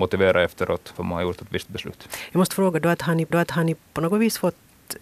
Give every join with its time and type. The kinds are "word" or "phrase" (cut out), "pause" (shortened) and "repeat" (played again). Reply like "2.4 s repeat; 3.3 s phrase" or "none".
1.0 s word; 3.3 s repeat